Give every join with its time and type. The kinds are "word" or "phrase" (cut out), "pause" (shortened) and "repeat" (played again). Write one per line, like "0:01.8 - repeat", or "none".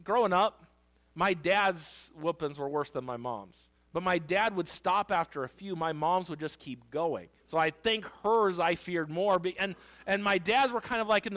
0:03.7 - pause
0:07.4 - pause